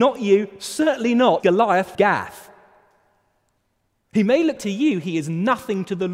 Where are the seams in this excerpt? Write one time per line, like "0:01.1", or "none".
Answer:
0:01.4
0:01.9
0:04.6

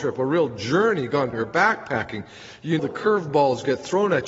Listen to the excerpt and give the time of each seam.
0:01.3
0:02.8

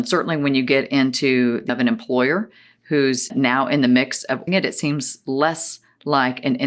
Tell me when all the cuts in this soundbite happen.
0:01.7
0:03.3
0:04.5

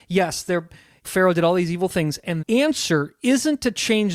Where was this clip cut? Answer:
0:01.0
0:02.4

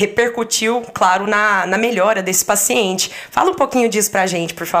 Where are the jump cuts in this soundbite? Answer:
none

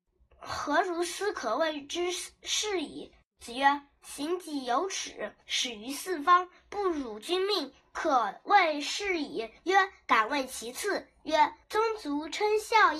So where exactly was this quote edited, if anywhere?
0:05.4
0:09.6
0:11.6

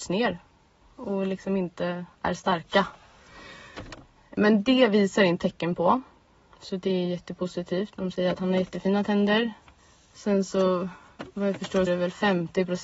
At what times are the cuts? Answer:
0:02.1
0:05.4
0:11.9

